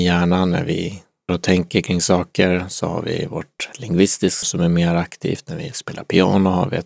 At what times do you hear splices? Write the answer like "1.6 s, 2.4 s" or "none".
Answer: 1.3 s, 3.7 s, 4.4 s